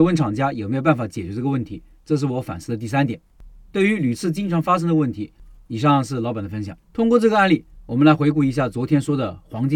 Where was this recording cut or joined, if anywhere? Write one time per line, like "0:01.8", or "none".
0:06.8